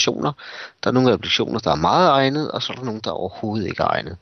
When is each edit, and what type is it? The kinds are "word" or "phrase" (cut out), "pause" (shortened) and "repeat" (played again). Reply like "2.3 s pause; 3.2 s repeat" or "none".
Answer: none